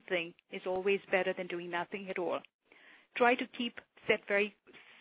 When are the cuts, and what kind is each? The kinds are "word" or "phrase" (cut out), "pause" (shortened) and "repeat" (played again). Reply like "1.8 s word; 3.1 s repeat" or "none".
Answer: none